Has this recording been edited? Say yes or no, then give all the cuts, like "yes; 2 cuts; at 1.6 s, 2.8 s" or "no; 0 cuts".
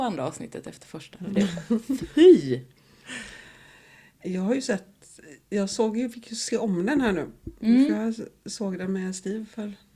no; 0 cuts